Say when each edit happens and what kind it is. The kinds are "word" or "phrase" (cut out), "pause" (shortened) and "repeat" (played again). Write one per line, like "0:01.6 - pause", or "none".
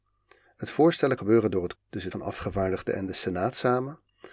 0:01.2 - word
0:01.7 - word
0:02.1 - word